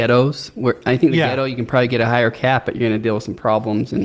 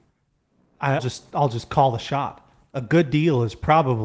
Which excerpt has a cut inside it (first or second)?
second